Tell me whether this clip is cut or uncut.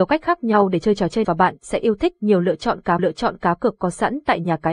cut